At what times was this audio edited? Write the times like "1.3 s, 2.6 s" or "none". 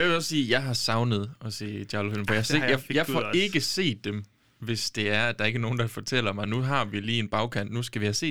none